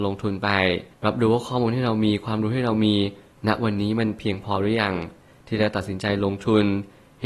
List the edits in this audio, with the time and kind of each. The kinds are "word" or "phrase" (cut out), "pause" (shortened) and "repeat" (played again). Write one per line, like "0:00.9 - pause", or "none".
0:00.9 - pause